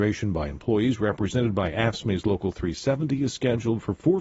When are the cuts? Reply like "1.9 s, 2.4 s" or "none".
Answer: none